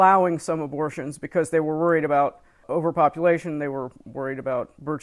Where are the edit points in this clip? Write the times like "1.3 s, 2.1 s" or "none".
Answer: none